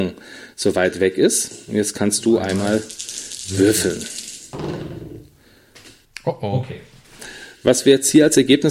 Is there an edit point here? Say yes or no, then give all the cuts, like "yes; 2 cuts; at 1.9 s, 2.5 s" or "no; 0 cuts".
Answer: no; 0 cuts